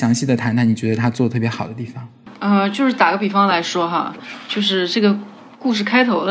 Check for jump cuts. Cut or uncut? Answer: uncut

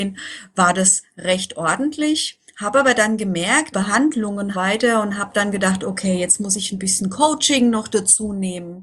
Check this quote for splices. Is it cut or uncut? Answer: cut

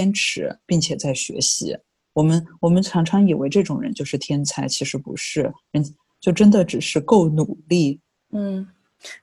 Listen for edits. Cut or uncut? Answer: uncut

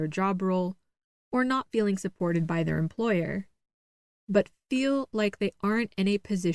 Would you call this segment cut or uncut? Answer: uncut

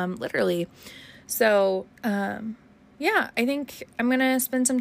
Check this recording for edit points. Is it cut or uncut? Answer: cut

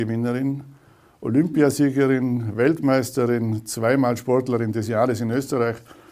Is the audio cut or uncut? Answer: uncut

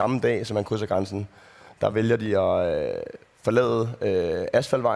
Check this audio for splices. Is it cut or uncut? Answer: uncut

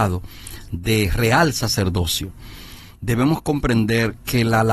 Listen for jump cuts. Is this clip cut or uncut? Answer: uncut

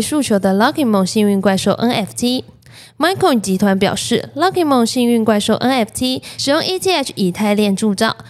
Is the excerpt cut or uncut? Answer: uncut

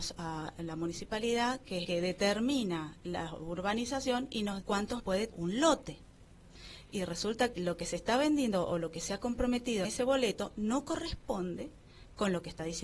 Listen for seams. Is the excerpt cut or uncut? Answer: cut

